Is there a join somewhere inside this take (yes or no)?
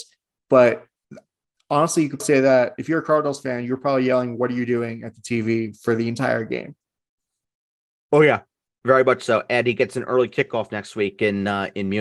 yes